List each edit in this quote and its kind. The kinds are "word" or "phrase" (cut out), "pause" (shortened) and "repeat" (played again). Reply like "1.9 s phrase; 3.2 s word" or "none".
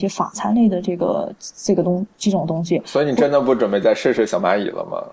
2.1 s pause